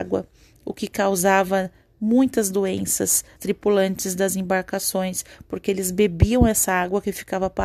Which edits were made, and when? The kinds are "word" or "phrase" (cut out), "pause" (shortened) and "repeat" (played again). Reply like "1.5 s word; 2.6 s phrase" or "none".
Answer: 3.4 s word